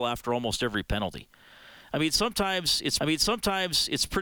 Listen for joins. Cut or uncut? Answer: cut